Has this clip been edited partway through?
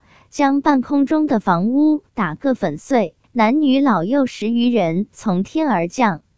yes; 1 cut; at 3.2 s

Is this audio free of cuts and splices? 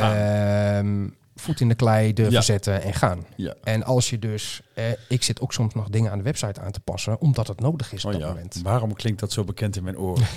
yes; 0 cuts

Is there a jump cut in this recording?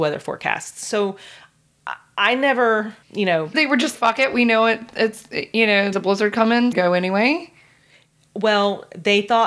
yes; 5 cuts; at 3.0 s, 3.5 s, 3.9 s, 5.9 s, 6.7 s

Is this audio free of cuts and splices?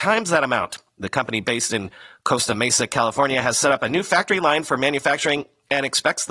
yes; 0 cuts

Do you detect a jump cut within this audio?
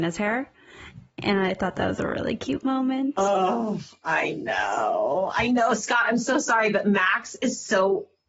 no; 0 cuts

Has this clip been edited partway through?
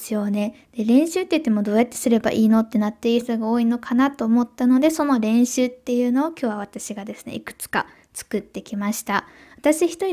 no; 0 cuts

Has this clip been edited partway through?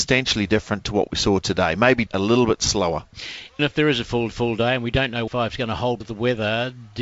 yes; 5 cuts; at 2.1 s, 3.6 s, 4.3 s, 5.3 s, 6.0 s

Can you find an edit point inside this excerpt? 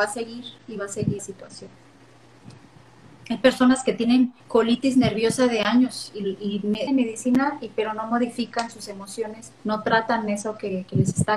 yes; 4 cuts; at 1.2 s, 4.4 s, 6.9 s, 9.5 s

